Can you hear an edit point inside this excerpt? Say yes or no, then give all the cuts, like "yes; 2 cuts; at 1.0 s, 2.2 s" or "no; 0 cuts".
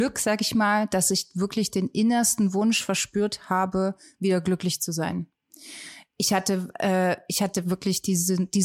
no; 0 cuts